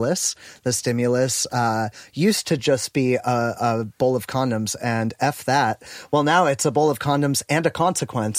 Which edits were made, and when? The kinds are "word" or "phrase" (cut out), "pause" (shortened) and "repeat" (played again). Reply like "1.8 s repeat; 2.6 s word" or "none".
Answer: none